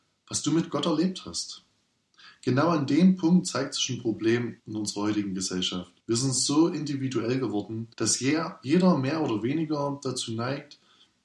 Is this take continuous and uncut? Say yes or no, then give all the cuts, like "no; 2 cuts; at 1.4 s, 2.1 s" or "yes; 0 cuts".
no; 3 cuts; at 4.6 s, 6.0 s, 7.9 s